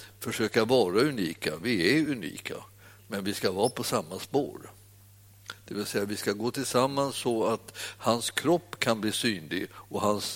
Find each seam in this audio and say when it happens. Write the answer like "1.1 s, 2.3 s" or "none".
none